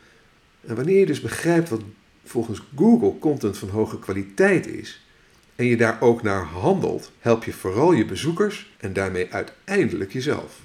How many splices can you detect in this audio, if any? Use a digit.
2